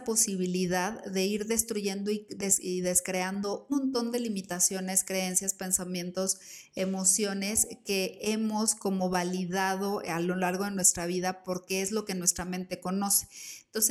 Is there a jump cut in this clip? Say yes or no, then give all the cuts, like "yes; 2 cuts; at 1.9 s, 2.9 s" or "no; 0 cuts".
yes; 1 cut; at 3.7 s